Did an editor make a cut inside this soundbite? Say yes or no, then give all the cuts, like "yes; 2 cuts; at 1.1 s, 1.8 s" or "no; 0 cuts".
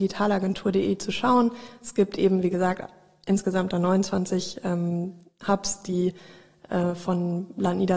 no; 0 cuts